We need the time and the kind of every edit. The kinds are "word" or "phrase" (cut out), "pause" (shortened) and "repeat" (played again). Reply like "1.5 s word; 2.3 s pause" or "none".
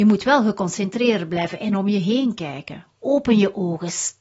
none

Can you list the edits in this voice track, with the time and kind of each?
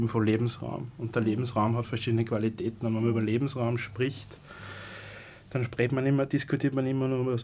none

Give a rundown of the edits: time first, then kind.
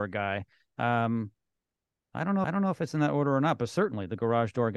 2.4 s repeat

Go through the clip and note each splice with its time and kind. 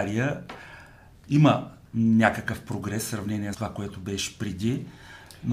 3.5 s word

